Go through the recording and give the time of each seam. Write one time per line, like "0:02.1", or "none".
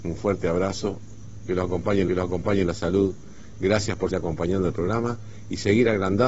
0:02.1
0:04.1